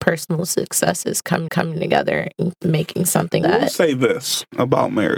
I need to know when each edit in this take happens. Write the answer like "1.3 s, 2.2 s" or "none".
1.5 s, 2.6 s, 3.4 s